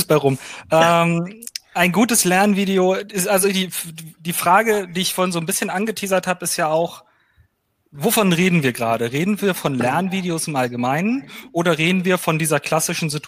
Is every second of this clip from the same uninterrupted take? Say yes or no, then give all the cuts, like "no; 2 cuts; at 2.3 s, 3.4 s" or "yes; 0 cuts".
yes; 0 cuts